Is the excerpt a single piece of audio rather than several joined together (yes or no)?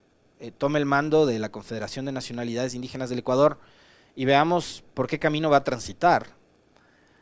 yes